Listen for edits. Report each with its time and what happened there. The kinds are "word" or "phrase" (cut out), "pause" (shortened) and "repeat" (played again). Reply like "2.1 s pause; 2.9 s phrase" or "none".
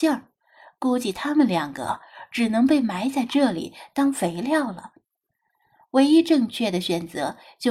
none